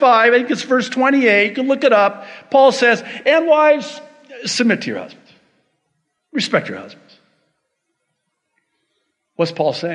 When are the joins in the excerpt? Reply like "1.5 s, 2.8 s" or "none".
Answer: none